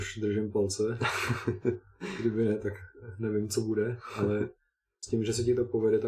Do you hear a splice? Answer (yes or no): no